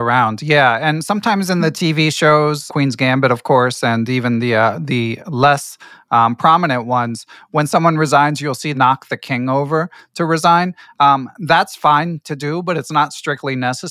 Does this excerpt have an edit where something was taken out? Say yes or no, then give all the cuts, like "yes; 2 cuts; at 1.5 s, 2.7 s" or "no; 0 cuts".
yes; 3 cuts; at 2.7 s, 5.2 s, 8.7 s